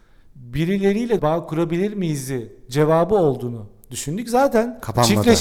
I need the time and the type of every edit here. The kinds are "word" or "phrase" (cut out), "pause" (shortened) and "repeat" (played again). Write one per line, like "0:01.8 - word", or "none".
0:01.2 - phrase